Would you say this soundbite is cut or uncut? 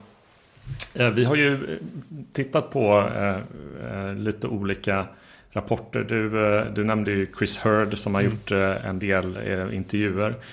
uncut